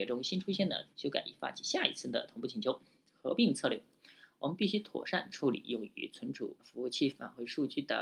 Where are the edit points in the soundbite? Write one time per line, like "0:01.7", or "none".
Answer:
0:00.9
0:06.6